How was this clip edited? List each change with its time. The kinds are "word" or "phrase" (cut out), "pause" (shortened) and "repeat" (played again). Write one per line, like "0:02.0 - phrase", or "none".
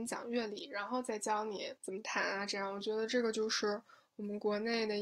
none